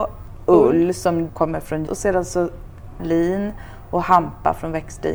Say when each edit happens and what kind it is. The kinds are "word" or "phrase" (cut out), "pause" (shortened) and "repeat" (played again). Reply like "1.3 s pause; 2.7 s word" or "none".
1.3 s word; 1.9 s word; 3.0 s word